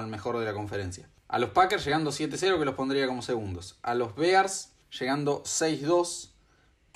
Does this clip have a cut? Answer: no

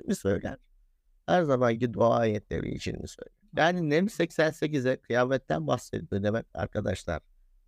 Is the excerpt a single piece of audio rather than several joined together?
no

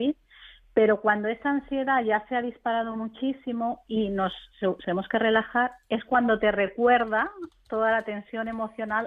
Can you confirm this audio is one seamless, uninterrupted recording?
no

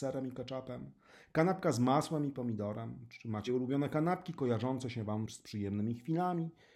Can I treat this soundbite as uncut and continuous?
no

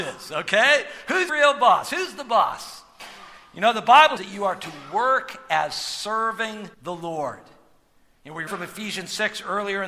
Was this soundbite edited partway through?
yes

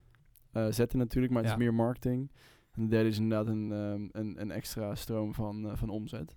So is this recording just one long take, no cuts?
yes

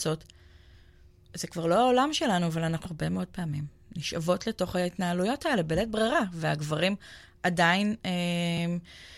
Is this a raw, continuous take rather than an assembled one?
no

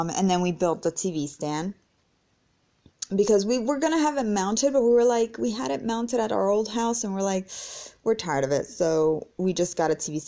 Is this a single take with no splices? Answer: yes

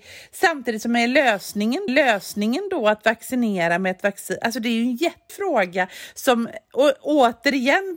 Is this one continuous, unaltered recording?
no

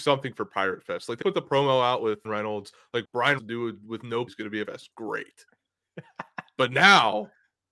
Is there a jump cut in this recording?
yes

